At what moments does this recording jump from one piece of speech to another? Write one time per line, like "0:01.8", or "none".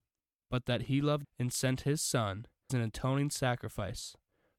0:01.2
0:02.7